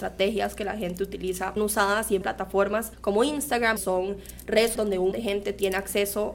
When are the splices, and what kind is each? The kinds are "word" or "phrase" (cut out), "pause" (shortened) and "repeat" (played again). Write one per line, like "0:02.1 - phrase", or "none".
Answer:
0:01.6 - word
0:02.2 - word
0:02.9 - pause
0:03.8 - phrase
0:04.8 - word
0:05.1 - word